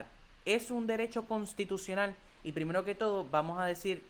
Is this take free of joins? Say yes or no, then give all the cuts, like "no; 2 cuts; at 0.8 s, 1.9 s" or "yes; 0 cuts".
yes; 0 cuts